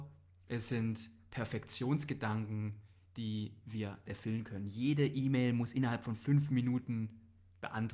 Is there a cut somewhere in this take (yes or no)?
yes